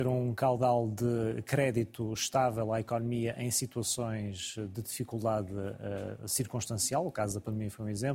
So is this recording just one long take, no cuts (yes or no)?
yes